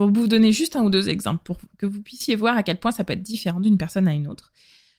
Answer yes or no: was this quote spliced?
no